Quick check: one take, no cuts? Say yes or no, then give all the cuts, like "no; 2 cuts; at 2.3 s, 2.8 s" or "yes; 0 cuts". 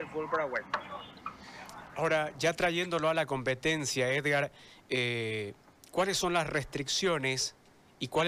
yes; 0 cuts